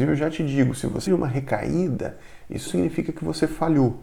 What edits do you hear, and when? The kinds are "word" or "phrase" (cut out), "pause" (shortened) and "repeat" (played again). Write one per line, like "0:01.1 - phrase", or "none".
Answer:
0:01.1 - word
0:02.7 - word